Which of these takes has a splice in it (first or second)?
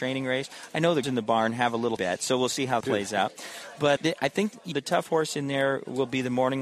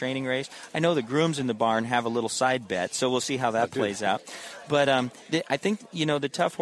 first